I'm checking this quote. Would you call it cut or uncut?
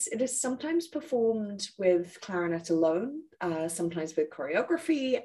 uncut